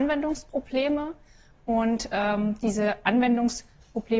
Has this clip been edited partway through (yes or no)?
no